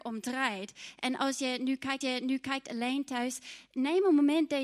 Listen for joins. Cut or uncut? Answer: cut